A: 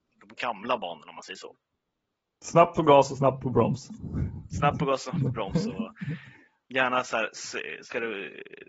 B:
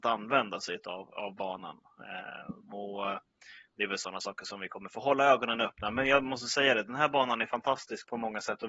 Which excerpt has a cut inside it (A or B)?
B